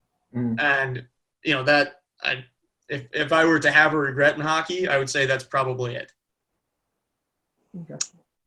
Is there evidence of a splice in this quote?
no; 0 cuts

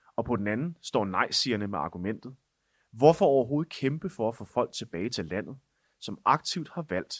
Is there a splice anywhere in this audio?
no; 0 cuts

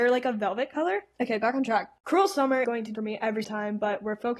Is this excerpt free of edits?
no; 3 cuts; at 2.6 s, 2.9 s, 3.4 s

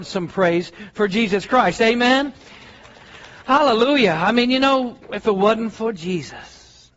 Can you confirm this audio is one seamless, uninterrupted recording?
yes; 0 cuts

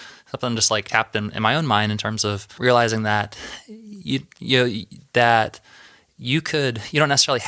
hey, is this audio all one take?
yes; 0 cuts

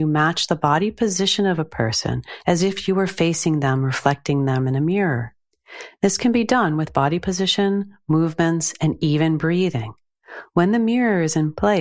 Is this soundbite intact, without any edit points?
yes; 0 cuts

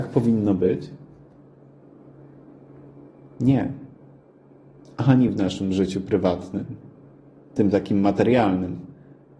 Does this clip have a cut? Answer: no; 0 cuts

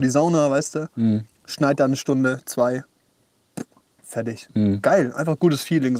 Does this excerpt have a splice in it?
no; 0 cuts

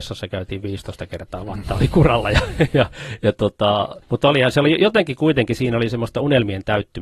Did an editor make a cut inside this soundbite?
yes; 1 cut; at 4.0 s

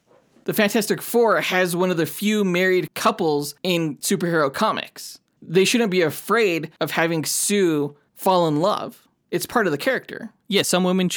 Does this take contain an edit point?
no; 0 cuts

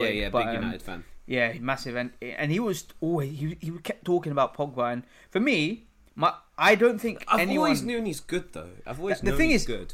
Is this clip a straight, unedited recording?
yes; 0 cuts

